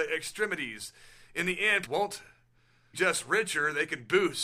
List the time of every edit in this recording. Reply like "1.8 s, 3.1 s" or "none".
1.9 s, 2.9 s